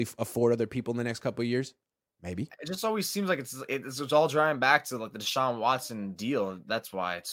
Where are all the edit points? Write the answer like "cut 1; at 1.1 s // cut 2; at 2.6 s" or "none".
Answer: none